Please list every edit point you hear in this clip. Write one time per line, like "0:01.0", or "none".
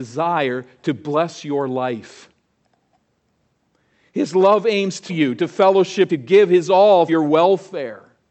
0:05.1
0:06.1
0:07.1